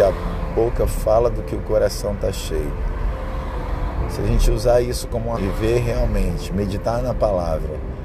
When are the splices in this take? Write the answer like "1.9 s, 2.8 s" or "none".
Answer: 5.4 s